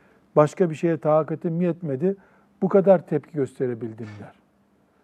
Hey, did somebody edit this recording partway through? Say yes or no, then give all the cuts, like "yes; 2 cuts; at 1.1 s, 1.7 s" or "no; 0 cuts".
no; 0 cuts